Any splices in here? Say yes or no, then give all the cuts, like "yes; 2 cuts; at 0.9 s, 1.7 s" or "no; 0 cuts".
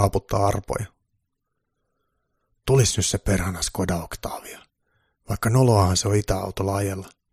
no; 0 cuts